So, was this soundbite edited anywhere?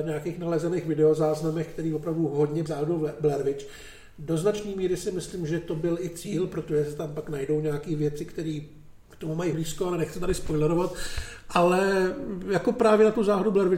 yes; 3 cuts; at 2.7 s, 9.0 s, 9.5 s

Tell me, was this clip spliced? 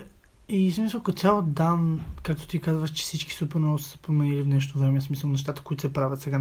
no; 0 cuts

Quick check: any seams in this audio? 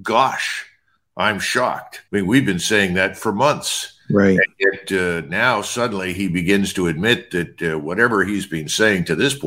yes; 1 cut; at 2.1 s

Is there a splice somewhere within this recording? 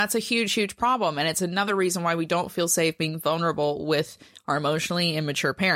no; 0 cuts

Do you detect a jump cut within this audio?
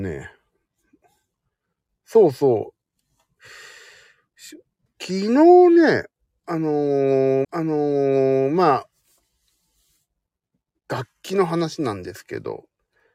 yes; 2 cuts; at 4.9 s, 7.4 s

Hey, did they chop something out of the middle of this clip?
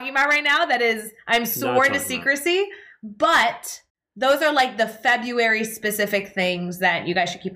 yes; 1 cut; at 3.9 s

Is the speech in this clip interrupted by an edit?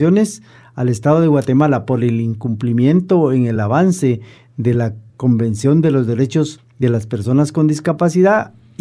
no; 0 cuts

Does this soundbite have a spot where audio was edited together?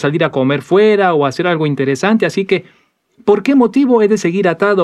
no; 0 cuts

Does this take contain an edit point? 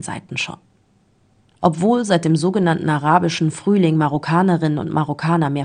no; 0 cuts

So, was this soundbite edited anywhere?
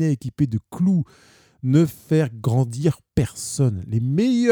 no; 0 cuts

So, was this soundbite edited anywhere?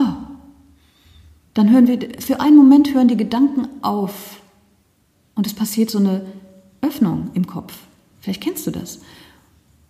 no; 0 cuts

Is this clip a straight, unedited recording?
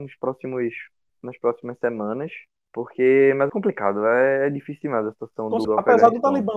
no; 2 cuts; at 3.5 s, 5.6 s

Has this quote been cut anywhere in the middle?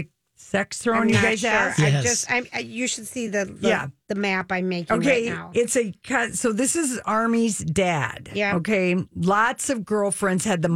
no; 0 cuts

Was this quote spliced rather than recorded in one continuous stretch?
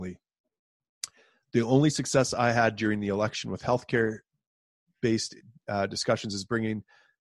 no; 0 cuts

